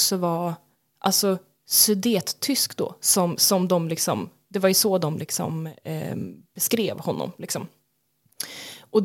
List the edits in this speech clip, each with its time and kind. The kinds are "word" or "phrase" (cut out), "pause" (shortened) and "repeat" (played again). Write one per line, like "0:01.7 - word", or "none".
none